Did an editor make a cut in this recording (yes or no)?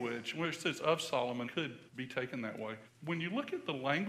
yes